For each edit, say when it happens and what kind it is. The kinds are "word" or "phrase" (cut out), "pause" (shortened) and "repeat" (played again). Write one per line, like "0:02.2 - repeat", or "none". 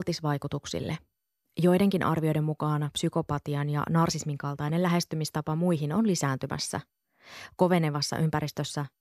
none